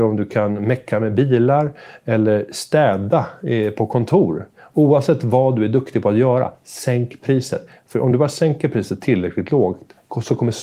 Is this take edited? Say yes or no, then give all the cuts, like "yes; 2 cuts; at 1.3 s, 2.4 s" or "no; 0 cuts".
no; 0 cuts